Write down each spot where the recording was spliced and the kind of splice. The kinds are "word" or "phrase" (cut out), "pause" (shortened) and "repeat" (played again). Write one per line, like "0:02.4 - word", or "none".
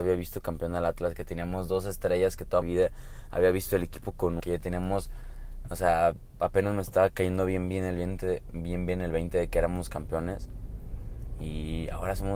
0:02.6 - word
0:04.4 - word